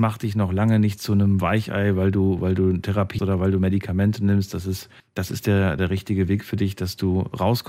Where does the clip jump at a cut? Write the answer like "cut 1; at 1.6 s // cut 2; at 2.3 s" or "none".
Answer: cut 1; at 3.2 s // cut 2; at 5.0 s // cut 3; at 5.8 s

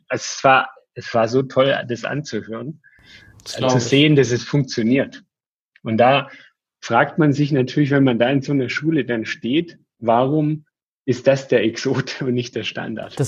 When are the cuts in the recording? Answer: none

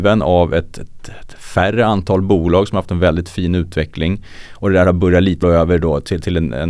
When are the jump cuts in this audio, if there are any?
cut 1; at 5.4 s

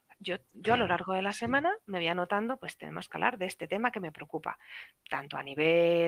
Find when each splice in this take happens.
none

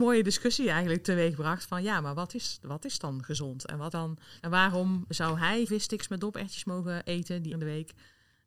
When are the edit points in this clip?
cut 1; at 3.9 s // cut 2; at 4.4 s // cut 3; at 5.7 s // cut 4; at 7.5 s

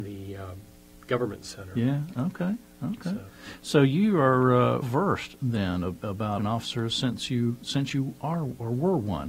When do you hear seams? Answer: cut 1; at 4.8 s // cut 2; at 6.4 s

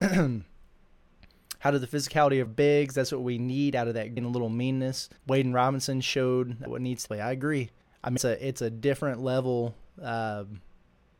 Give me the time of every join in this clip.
cut 1; at 2.5 s // cut 2; at 4.2 s // cut 3; at 5.2 s // cut 4; at 6.7 s // cut 5; at 7.1 s // cut 6; at 7.8 s // cut 7; at 8.2 s

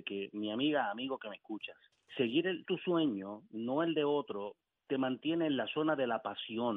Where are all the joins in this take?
cut 1; at 1.9 s // cut 2; at 2.6 s // cut 3; at 4.7 s

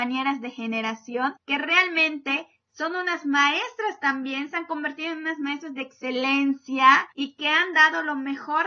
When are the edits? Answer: cut 1; at 1.4 s // cut 2; at 7.1 s

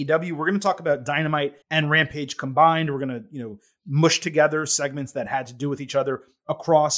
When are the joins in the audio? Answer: cut 1; at 1.6 s

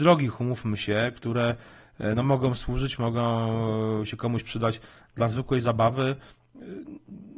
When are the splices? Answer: none

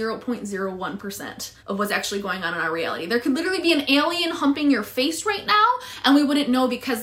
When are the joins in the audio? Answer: cut 1; at 1.6 s

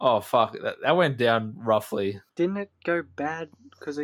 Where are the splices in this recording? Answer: cut 1; at 2.3 s

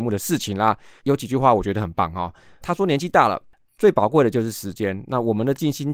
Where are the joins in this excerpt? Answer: cut 1; at 2.6 s

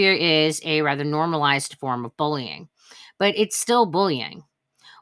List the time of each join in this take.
none

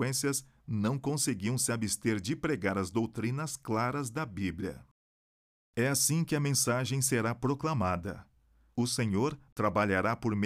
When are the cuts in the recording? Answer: none

